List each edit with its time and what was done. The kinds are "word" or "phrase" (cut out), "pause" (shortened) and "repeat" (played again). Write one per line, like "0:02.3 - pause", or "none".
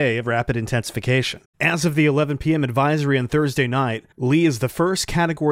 0:01.5 - pause
0:04.1 - pause